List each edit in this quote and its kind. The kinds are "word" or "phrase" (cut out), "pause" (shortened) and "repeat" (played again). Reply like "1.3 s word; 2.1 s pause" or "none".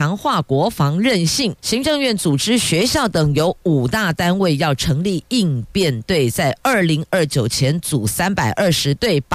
1.6 s pause